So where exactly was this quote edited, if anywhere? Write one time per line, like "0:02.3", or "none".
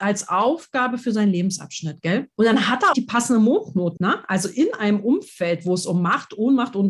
0:02.9
0:04.0